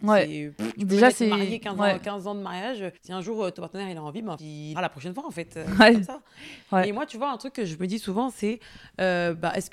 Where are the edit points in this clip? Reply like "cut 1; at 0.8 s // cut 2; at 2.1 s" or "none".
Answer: cut 1; at 3.0 s // cut 2; at 3.5 s // cut 3; at 4.4 s // cut 4; at 4.7 s